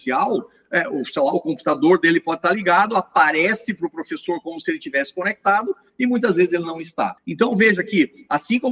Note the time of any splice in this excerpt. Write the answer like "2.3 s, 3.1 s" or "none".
7.2 s